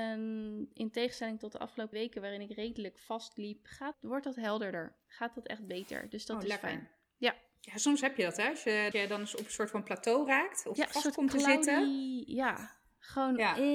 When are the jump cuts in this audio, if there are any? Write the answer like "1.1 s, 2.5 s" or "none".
1.9 s, 3.9 s, 8.9 s, 10.8 s